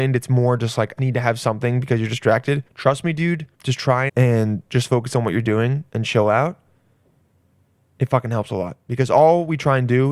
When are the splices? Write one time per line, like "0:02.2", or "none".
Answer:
0:01.0
0:02.7
0:03.5
0:04.1
0:04.7
0:05.9